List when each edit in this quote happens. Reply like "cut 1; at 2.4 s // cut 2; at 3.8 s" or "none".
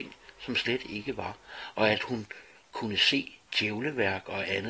none